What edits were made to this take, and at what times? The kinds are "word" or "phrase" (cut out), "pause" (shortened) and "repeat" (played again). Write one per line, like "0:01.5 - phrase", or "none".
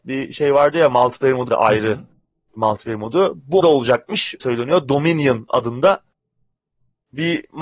0:01.5 - word
0:03.6 - word
0:04.4 - word